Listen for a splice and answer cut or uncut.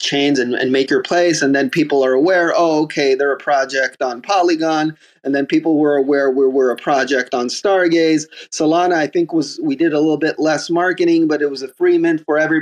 uncut